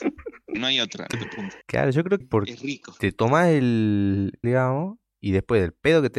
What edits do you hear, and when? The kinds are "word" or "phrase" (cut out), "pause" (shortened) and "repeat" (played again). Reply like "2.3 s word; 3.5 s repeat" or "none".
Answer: 1.1 s phrase; 1.6 s pause; 2.2 s word; 4.4 s phrase